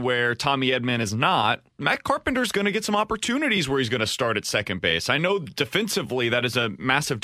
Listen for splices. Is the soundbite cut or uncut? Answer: cut